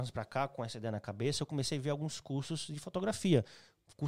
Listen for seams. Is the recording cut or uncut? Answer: uncut